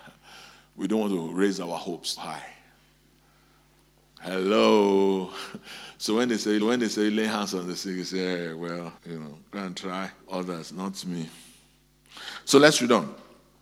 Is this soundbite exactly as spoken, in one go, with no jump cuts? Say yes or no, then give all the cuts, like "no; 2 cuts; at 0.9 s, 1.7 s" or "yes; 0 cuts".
no; 4 cuts; at 2.2 s, 6.6 s, 9.0 s, 10.2 s